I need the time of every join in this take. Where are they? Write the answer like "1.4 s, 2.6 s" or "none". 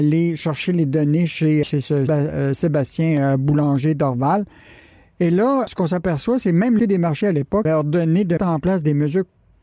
1.6 s, 2.1 s, 5.7 s, 6.8 s, 7.2 s, 7.6 s, 8.4 s